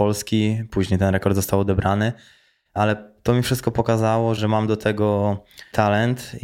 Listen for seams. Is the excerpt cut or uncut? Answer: uncut